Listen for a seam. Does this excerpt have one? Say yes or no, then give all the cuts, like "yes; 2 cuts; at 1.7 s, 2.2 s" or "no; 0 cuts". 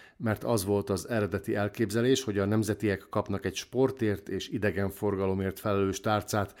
no; 0 cuts